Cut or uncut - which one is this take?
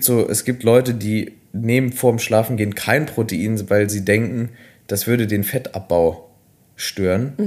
uncut